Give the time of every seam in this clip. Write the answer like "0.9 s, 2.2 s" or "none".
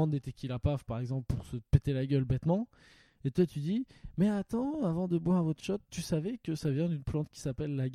none